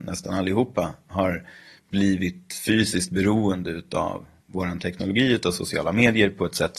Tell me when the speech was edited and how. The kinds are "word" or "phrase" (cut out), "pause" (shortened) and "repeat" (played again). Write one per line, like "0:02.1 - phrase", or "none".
none